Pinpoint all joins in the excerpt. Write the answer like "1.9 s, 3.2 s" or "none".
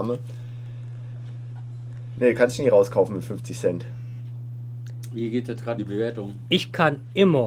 5.8 s